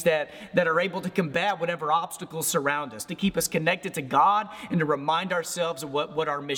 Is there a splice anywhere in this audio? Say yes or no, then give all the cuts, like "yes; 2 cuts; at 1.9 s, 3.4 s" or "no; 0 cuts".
no; 0 cuts